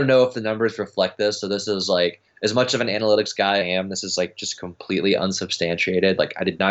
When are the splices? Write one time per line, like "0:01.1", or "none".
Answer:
0:03.6